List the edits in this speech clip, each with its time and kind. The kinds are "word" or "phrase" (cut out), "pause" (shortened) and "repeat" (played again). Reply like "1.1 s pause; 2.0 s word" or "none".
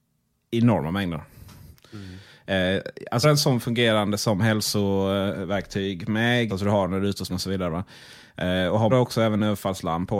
3.2 s word; 6.5 s word; 7.3 s word; 8.9 s word